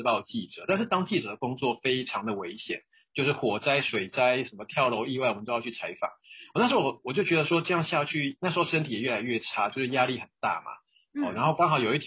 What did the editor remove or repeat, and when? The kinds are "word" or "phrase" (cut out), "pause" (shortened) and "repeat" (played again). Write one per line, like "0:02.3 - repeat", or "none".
none